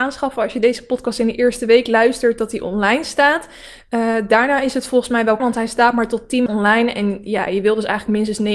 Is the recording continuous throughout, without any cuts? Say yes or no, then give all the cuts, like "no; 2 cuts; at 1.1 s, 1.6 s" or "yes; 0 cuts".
no; 2 cuts; at 5.4 s, 6.5 s